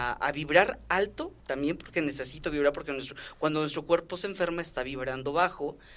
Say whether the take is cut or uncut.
cut